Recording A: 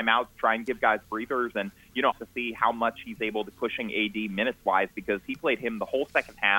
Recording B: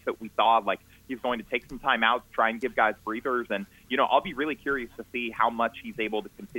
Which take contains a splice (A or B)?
A